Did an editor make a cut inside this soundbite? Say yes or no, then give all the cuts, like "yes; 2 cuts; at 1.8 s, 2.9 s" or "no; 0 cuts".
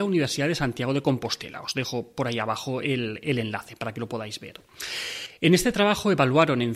no; 0 cuts